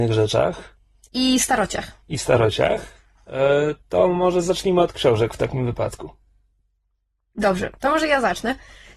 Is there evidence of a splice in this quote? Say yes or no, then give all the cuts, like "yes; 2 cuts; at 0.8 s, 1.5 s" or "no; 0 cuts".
no; 0 cuts